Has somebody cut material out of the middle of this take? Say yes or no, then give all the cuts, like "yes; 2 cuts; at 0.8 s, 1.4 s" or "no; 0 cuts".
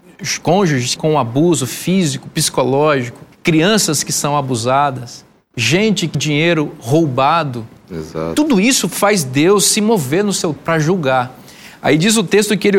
yes; 5 cuts; at 1.0 s, 3.3 s, 5.3 s, 6.1 s, 10.6 s